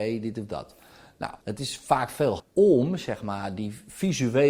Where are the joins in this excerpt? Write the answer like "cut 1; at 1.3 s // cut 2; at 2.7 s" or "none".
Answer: cut 1; at 1.4 s // cut 2; at 2.4 s